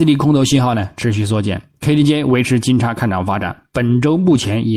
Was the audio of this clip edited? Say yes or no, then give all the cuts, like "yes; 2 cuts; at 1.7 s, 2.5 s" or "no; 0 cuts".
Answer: no; 0 cuts